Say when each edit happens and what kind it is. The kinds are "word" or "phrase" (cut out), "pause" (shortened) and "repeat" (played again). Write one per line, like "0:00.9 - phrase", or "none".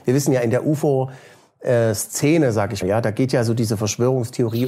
0:02.8 - word